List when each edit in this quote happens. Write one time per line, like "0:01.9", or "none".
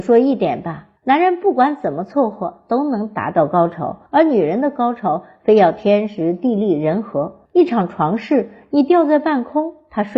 0:01.0
0:04.1
0:07.5